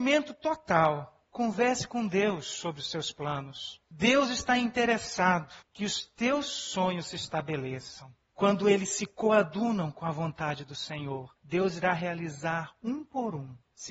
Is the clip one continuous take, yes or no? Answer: no